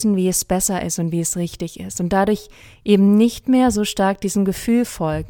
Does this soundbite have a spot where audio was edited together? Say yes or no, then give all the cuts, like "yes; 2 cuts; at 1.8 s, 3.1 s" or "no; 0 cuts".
no; 0 cuts